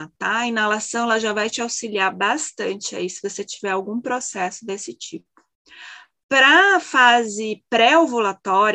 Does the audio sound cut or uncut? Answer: uncut